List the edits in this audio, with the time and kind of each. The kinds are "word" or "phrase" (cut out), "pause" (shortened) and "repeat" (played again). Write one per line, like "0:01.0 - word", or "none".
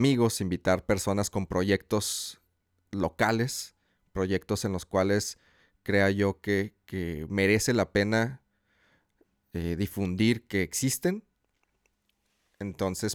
none